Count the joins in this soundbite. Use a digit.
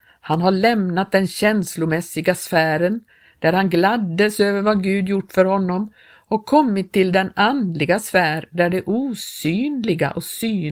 0